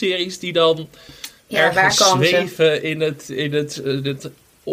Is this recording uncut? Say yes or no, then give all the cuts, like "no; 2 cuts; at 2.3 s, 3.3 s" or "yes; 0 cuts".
yes; 0 cuts